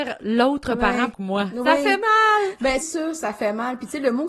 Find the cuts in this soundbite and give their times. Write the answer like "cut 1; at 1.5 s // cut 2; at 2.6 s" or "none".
cut 1; at 1.1 s // cut 2; at 2.8 s